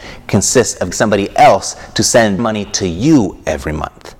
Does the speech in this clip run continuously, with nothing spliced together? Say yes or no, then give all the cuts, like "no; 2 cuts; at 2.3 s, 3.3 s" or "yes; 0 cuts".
no; 2 cuts; at 0.9 s, 2.4 s